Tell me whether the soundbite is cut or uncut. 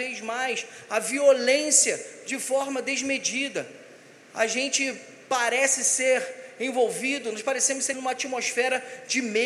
cut